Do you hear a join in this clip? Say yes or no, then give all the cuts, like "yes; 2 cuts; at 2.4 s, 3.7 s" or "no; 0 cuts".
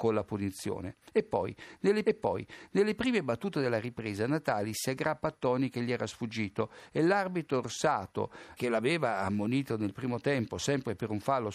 yes; 2 cuts; at 2.1 s, 8.6 s